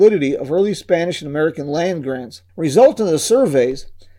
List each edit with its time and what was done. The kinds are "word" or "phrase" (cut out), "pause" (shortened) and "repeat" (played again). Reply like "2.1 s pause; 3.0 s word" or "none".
2.5 s pause